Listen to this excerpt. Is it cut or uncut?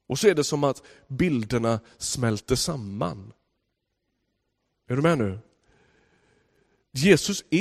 uncut